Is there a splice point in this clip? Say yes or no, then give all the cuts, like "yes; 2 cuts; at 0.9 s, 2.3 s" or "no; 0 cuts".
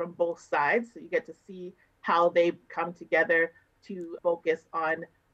yes; 1 cut; at 4.2 s